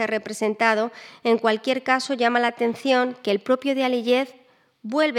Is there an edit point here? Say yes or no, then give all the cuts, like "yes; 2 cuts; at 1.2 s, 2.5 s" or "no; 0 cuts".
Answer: no; 0 cuts